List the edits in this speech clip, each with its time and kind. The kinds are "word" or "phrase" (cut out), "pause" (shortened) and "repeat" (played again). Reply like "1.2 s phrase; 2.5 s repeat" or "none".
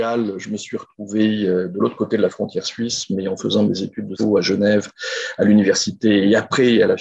4.1 s word